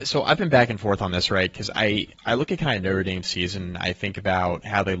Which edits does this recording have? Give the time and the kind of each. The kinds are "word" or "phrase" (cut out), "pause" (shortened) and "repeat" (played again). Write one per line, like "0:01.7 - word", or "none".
0:02.2 - pause